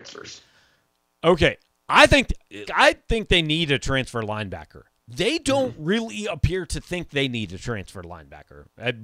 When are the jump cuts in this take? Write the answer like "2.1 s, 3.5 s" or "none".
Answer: 2.7 s